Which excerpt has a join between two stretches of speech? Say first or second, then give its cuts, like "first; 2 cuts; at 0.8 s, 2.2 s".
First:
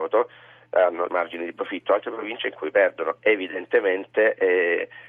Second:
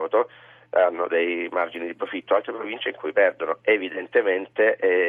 first; 1 cut; at 1.1 s